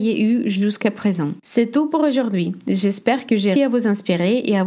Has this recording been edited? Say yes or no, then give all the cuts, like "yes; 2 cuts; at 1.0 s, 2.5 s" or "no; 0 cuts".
yes; 1 cut; at 3.6 s